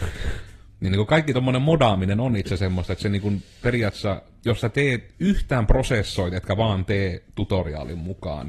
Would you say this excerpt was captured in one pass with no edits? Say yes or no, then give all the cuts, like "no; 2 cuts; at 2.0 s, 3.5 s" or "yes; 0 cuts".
yes; 0 cuts